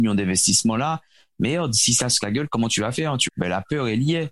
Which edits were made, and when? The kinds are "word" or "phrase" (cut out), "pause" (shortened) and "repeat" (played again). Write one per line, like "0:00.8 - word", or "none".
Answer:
0:02.2 - word
0:03.3 - word